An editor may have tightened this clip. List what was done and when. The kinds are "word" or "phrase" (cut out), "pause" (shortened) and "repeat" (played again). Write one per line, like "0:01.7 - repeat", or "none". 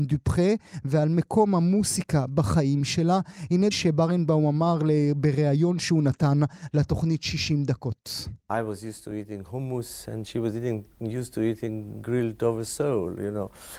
0:03.7 - word
0:08.4 - pause